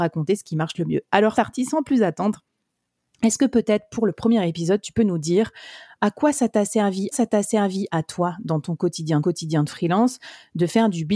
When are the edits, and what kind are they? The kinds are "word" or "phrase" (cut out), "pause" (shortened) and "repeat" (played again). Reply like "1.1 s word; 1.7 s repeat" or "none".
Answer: 1.3 s word; 7.1 s repeat; 9.2 s repeat